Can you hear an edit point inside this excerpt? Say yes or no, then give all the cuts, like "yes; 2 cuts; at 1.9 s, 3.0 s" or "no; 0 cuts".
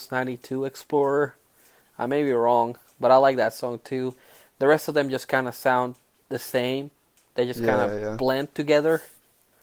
no; 0 cuts